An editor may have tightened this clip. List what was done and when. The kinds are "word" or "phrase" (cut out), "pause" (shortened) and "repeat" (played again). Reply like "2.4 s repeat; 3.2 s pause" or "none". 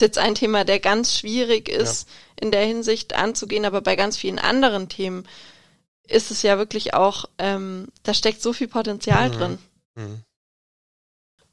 none